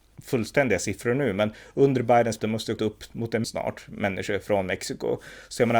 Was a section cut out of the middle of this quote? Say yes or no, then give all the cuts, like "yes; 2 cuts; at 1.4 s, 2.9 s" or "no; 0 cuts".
yes; 3 cuts; at 2.4 s, 2.8 s, 3.4 s